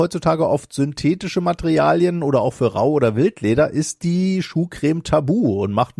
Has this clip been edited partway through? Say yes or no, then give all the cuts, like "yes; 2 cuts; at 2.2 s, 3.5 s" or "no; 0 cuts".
no; 0 cuts